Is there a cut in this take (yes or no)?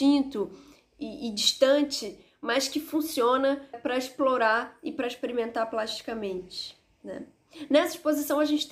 yes